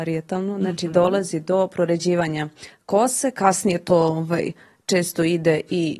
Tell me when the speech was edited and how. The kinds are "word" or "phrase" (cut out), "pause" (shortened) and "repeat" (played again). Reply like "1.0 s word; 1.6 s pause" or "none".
none

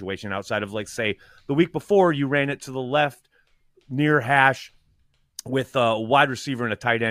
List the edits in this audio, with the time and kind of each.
none

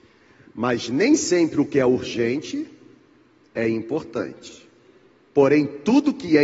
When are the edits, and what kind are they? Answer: none

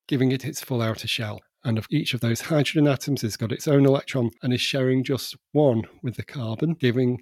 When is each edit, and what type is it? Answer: 1.9 s word

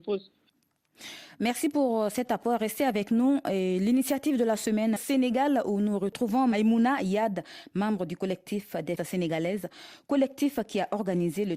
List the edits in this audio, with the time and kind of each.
5.0 s phrase; 9.0 s word

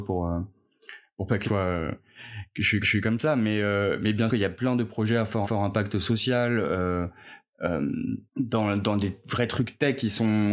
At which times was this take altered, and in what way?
1.5 s phrase; 2.8 s repeat; 4.3 s word; 5.4 s repeat; 8.3 s pause

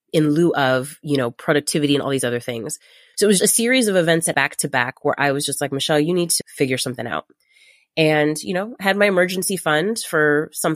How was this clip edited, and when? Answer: 3.4 s word; 4.3 s word; 6.4 s word

